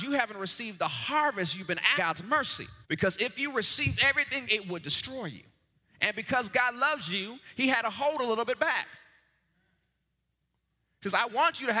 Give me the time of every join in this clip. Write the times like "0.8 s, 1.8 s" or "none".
1.9 s, 2.8 s, 4.5 s, 5.7 s